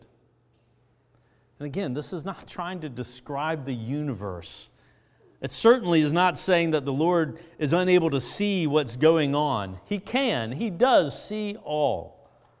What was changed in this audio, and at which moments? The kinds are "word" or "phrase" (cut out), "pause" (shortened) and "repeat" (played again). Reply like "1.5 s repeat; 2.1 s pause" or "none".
none